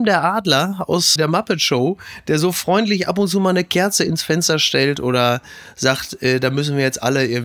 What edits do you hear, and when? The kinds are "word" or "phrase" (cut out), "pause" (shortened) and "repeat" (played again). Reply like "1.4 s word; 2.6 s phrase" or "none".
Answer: 1.2 s word